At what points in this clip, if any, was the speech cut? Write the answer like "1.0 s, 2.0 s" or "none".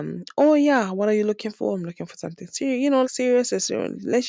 3.0 s

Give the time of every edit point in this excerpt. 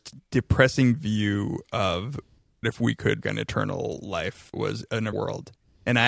0.9 s, 2.6 s, 3.2 s, 4.5 s, 5.1 s

